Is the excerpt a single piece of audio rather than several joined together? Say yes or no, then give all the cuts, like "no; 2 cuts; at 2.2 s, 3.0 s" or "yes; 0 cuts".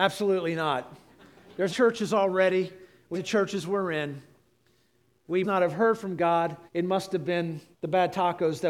no; 5 cuts; at 1.7 s, 3.1 s, 5.4 s, 6.7 s, 7.7 s